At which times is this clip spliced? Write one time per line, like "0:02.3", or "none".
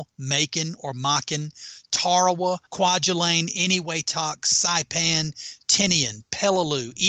0:02.7